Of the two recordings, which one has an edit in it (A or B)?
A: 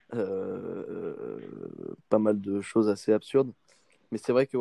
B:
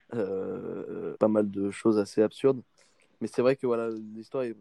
B